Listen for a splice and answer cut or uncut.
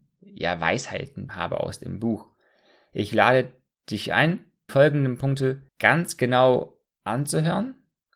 cut